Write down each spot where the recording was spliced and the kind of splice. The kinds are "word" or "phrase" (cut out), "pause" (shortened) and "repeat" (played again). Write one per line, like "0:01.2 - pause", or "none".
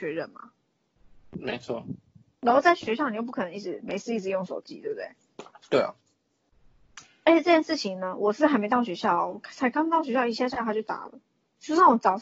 none